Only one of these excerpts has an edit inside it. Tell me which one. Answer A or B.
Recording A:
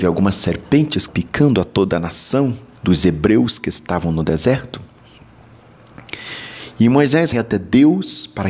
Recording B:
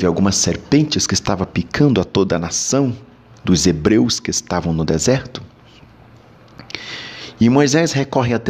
A